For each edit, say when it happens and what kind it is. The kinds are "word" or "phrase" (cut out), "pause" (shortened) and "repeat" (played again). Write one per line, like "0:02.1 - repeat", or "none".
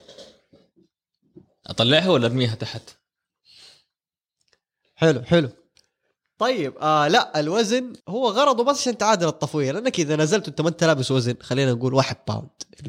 0:08.0 - pause

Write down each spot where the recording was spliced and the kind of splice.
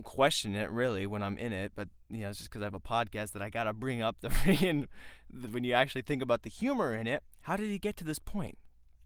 0:07.3 - pause

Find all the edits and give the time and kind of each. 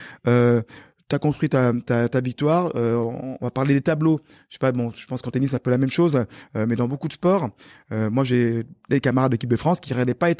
none

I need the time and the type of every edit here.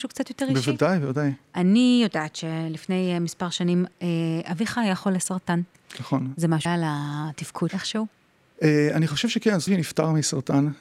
0:06.7 - word
0:07.7 - word
0:09.7 - word

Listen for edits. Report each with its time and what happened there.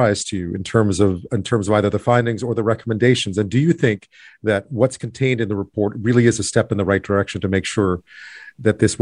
none

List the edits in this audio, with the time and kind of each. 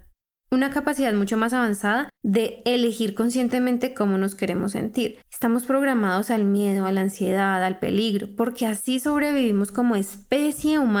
0:02.2 - pause
0:05.2 - pause

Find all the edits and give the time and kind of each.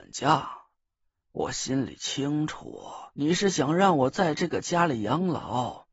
0:03.1 - pause

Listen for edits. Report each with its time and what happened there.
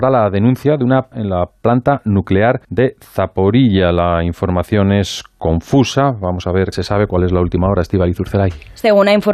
0:01.1 - word
0:02.6 - pause
0:06.7 - word

